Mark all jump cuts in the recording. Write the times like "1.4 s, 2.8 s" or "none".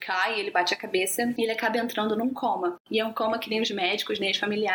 none